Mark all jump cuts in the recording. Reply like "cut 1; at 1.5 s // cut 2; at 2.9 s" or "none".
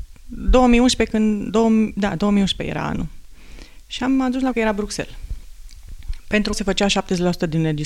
cut 1; at 4.5 s // cut 2; at 6.5 s